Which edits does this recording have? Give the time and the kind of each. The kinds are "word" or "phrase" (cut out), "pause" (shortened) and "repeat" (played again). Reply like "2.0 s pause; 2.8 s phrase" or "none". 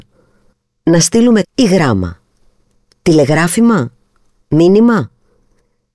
1.4 s word